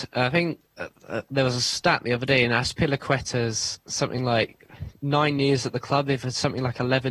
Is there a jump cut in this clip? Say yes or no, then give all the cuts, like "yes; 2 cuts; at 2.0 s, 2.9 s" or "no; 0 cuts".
no; 0 cuts